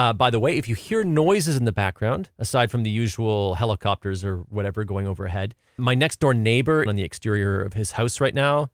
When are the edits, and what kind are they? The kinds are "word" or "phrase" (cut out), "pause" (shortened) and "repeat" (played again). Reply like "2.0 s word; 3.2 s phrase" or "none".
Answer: 2.3 s pause; 5.8 s word; 6.9 s phrase